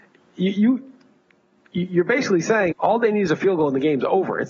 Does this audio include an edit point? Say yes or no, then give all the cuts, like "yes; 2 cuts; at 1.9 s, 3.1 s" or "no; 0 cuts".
yes; 1 cut; at 2.7 s